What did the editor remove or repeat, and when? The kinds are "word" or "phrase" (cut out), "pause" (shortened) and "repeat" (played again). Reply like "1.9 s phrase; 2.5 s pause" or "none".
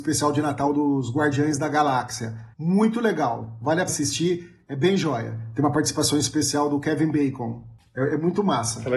2.5 s pause; 3.9 s word